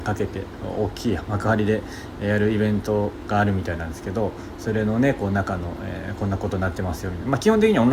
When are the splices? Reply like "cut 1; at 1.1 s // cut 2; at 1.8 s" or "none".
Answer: none